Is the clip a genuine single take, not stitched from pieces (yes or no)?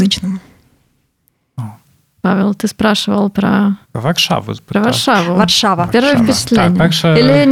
no